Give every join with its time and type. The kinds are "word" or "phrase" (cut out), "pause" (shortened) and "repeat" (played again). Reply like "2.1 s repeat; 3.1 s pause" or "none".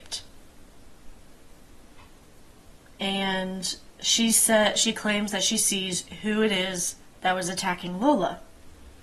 none